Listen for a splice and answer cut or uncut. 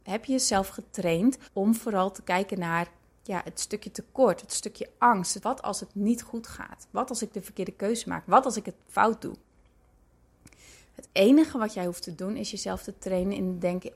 cut